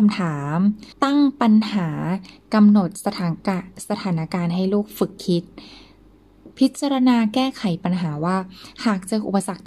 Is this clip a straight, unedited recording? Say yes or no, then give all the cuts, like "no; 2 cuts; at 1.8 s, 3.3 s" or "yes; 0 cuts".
no; 1 cut; at 0.9 s